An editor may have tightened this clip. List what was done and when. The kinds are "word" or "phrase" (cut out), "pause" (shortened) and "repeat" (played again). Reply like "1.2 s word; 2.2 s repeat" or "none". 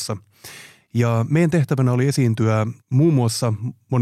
2.8 s pause